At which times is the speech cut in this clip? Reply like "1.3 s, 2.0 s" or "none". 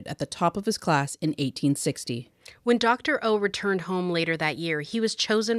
none